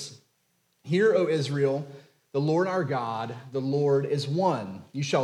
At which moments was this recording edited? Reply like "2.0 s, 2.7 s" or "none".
none